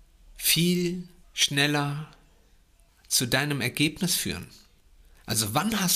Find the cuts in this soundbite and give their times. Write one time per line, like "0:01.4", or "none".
none